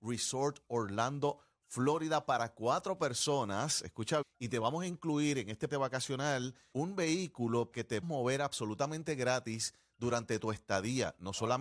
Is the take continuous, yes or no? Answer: no